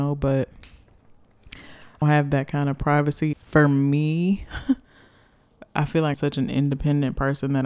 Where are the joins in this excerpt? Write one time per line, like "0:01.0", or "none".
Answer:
0:02.0
0:03.3
0:06.1

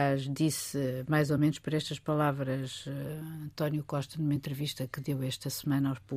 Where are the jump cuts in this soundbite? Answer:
none

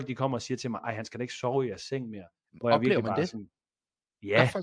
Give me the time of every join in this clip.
none

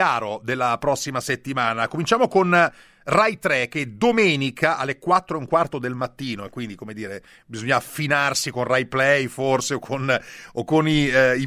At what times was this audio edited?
none

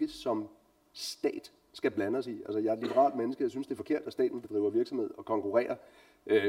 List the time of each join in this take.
none

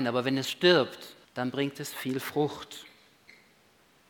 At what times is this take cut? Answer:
0:01.2

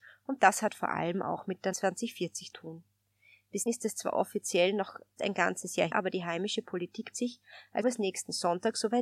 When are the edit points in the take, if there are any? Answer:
0:01.7
0:02.5
0:03.7
0:05.2
0:05.9
0:07.1
0:07.8

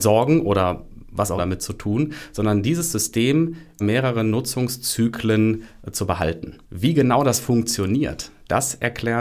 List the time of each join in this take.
0:01.4
0:03.8
0:06.6

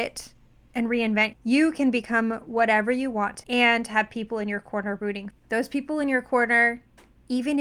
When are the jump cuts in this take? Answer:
0:01.3
0:03.4
0:05.3

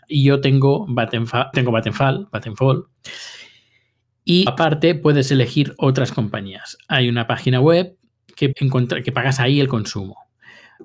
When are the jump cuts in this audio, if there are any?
0:01.5
0:04.5
0:08.5
0:09.0

